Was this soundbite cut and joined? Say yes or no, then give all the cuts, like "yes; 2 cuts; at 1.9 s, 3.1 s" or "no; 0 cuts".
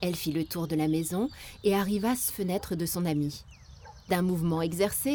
yes; 1 cut; at 2.3 s